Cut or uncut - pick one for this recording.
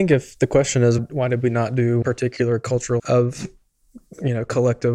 cut